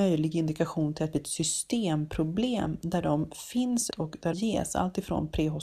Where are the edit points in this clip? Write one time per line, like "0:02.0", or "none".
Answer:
0:03.9
0:04.3